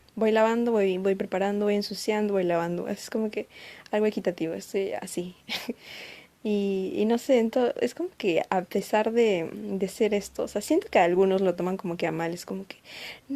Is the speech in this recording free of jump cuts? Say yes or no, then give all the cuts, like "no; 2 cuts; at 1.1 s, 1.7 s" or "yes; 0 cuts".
yes; 0 cuts